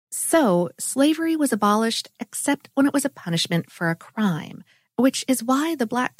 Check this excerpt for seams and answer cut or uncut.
uncut